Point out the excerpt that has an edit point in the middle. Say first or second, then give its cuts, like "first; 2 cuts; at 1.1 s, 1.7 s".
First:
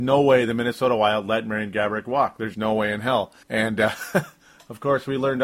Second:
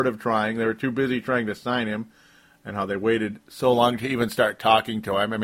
first; 2 cuts; at 2.5 s, 3.4 s